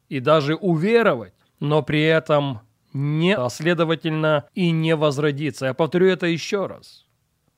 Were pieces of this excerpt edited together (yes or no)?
yes